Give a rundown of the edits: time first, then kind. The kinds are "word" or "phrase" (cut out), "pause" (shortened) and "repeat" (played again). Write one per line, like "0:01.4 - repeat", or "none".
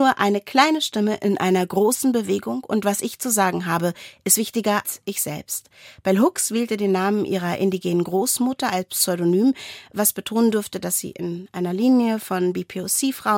0:04.8 - word